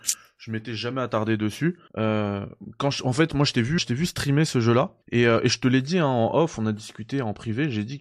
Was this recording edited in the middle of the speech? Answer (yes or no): yes